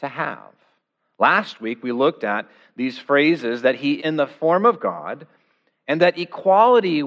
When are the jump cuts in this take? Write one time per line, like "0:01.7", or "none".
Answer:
0:04.0